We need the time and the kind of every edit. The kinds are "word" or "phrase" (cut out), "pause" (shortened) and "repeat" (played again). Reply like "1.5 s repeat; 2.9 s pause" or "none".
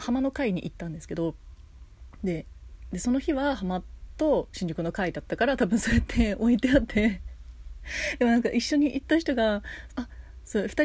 9.9 s phrase